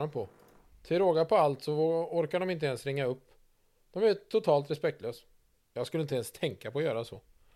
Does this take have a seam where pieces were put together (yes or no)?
no